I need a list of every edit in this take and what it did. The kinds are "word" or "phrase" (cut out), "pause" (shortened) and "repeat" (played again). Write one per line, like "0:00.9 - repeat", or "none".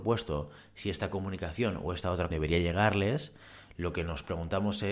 0:02.3 - word